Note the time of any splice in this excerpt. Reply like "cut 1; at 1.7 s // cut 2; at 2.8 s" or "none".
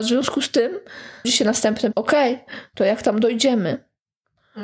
cut 1; at 1.2 s // cut 2; at 1.9 s